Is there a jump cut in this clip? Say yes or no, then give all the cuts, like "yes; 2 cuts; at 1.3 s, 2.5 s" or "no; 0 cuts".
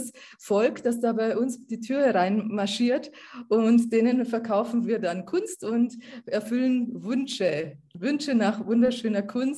no; 0 cuts